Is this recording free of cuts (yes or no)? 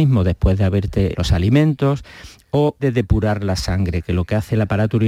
no